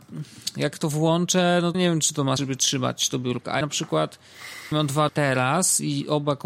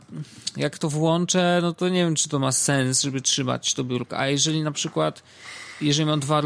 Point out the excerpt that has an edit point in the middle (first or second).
first